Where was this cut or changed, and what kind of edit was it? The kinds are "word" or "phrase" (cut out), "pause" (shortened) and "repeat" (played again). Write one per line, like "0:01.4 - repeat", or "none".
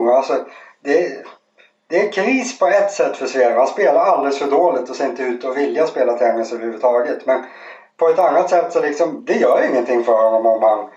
none